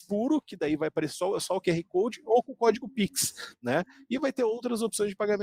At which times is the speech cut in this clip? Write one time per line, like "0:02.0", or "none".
none